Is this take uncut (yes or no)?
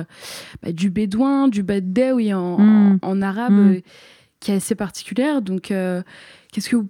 yes